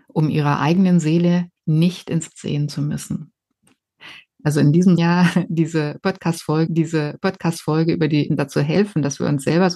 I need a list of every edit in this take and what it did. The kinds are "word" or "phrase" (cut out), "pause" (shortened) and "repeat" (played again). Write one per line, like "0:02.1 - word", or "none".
0:01.6 - pause
0:02.3 - word
0:05.0 - phrase
0:06.7 - repeat
0:08.3 - word